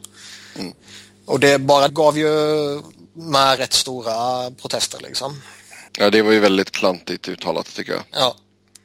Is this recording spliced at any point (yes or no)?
yes